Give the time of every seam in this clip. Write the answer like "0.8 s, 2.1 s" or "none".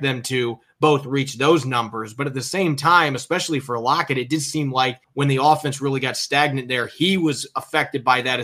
5.0 s